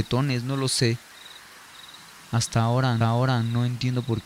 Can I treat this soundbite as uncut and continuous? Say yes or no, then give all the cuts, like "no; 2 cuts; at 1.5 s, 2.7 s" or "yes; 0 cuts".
no; 1 cut; at 3.0 s